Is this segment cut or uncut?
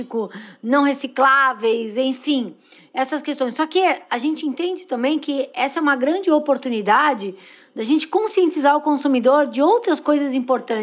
uncut